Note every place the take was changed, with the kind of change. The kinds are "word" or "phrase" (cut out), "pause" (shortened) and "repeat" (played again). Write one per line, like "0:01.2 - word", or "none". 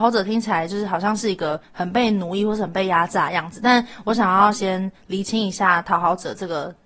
0:01.6 - pause